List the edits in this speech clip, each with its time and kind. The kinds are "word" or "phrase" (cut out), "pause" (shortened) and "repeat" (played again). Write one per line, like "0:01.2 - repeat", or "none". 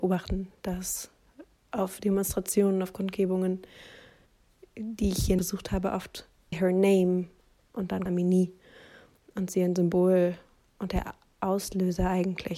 0:05.4 - word
0:06.5 - phrase
0:08.1 - phrase